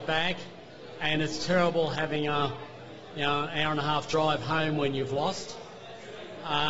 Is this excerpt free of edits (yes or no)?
yes